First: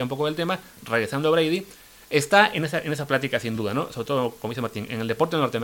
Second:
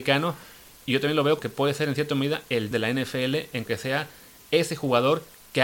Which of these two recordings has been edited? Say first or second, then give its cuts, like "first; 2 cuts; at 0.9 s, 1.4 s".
second; 3 cuts; at 1.4 s, 2.7 s, 3.7 s